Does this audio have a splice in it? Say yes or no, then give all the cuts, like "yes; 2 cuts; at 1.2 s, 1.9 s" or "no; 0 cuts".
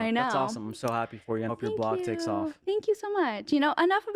yes; 1 cut; at 1.5 s